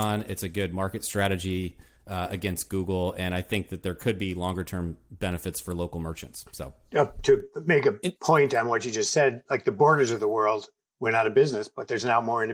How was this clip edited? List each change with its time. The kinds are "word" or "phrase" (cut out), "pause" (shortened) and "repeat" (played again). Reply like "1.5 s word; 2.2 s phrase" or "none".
none